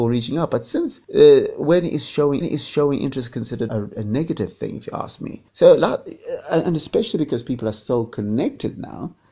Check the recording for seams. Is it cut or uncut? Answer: cut